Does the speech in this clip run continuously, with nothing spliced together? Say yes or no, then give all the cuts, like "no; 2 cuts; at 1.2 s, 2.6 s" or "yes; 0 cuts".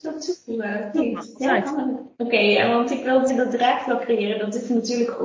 no; 2 cuts; at 2.2 s, 3.3 s